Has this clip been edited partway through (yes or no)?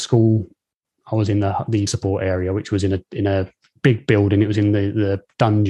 yes